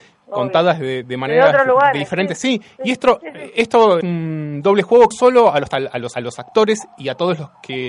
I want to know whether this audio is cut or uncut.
cut